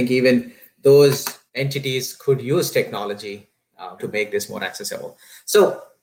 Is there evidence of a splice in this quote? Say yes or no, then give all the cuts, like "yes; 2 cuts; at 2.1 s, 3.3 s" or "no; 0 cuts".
yes; 2 cuts; at 1.5 s, 4.0 s